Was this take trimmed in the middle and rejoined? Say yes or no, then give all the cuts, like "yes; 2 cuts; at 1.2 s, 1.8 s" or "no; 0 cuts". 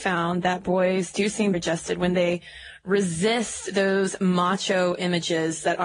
yes; 1 cut; at 1.5 s